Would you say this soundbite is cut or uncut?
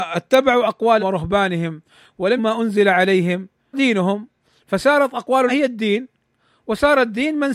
cut